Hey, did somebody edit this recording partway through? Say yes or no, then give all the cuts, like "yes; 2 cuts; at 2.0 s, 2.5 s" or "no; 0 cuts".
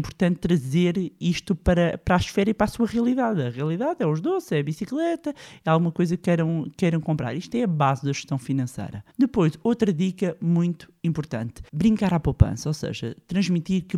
yes; 2 cuts; at 9.1 s, 11.7 s